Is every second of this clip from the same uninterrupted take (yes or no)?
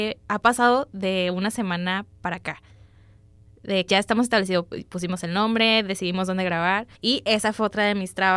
no